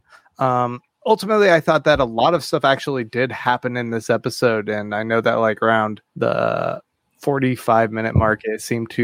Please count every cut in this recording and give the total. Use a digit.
2